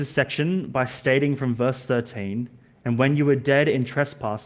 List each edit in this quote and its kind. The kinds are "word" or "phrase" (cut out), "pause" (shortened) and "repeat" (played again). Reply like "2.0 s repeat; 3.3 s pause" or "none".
none